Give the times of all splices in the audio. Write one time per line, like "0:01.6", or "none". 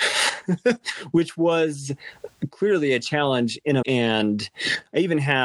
0:03.8